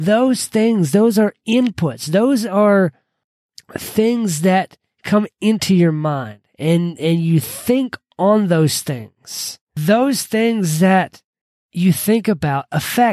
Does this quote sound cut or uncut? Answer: uncut